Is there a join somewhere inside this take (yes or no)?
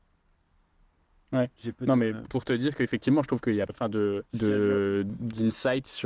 yes